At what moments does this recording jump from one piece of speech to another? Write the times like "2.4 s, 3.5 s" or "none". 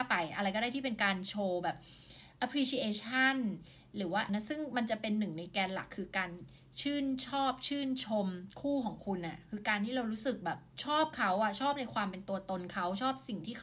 4.3 s